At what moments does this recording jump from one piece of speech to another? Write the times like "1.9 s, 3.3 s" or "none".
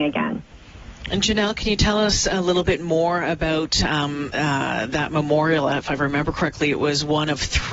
none